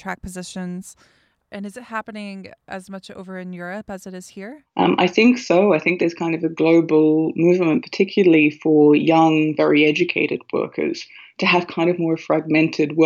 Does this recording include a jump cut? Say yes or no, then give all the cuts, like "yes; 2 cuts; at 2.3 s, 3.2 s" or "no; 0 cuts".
no; 0 cuts